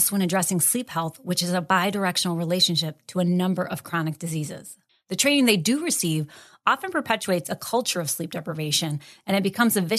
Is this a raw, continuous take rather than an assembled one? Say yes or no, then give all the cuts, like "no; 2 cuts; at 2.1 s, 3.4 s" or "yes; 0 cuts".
yes; 0 cuts